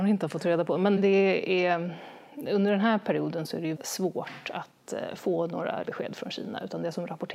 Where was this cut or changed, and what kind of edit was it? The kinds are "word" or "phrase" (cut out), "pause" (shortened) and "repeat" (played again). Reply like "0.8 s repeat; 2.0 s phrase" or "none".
1.0 s word; 3.7 s word; 5.8 s word